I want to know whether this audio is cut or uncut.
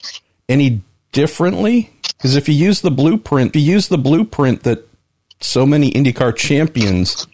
cut